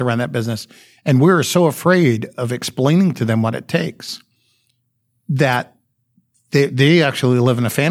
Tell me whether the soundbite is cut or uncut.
uncut